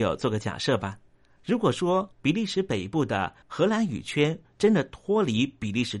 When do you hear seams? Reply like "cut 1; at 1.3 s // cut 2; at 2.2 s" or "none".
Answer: cut 1; at 1.1 s // cut 2; at 2.1 s // cut 3; at 3.4 s